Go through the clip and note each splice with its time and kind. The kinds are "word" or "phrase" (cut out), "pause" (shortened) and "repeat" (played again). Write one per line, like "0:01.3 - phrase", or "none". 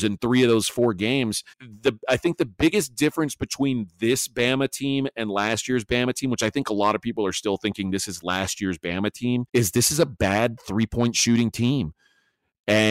0:01.5 - pause
0:09.5 - pause

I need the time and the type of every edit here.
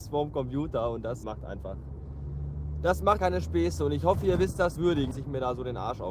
0:01.2 - word
0:03.2 - word
0:04.8 - word
0:05.1 - word

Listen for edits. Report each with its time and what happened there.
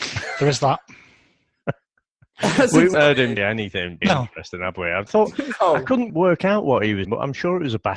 0:02.9 - word
0:03.4 - word
0:04.0 - word
0:05.1 - word
0:06.1 - word
0:07.0 - word

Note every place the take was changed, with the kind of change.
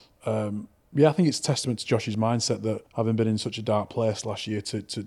0:02.9 - pause

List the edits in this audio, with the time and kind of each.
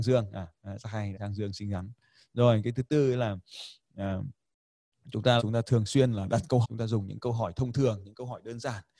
0:01.1 - word
0:05.4 - word
0:06.6 - word

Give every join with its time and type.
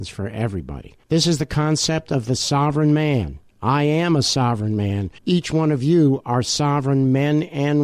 0:01.0 - pause
0:03.5 - pause
0:05.2 - pause

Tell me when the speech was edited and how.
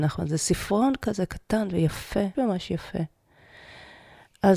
0:02.3 - word

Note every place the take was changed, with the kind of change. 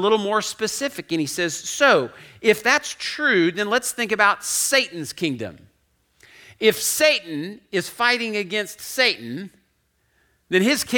none

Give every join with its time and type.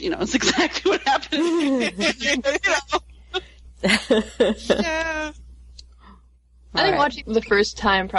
0:07.2 - word

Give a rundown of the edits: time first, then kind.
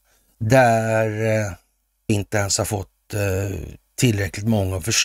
0:02.1 - word

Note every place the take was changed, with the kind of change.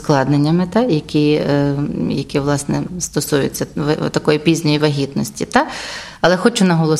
none

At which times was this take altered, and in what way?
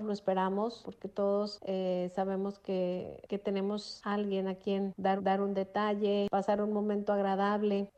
0:05.2 - repeat

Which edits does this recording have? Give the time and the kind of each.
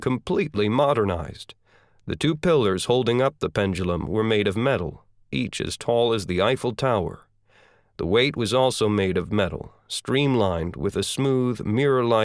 none

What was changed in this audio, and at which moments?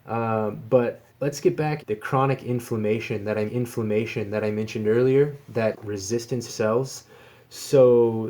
0:01.1 - pause
0:01.8 - phrase
0:03.5 - repeat
0:05.7 - phrase
0:06.5 - phrase

